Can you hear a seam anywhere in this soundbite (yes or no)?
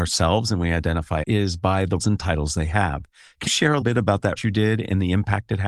yes